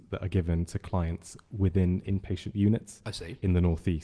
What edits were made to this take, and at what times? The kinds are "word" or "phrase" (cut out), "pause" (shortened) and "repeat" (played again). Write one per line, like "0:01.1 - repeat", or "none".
none